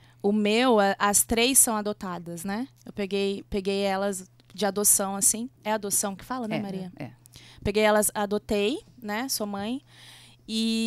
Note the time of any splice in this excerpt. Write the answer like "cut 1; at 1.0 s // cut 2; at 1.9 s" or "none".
cut 1; at 5.6 s